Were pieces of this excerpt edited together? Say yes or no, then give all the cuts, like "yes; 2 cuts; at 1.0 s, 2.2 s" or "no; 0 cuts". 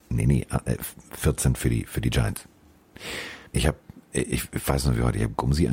yes; 1 cut; at 3.5 s